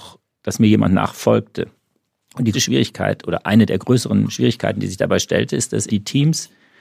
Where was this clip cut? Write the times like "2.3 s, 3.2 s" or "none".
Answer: 2.5 s, 5.9 s